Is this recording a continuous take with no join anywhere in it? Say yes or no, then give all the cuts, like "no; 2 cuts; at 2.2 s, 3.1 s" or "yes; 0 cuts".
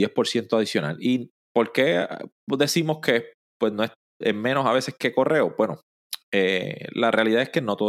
yes; 0 cuts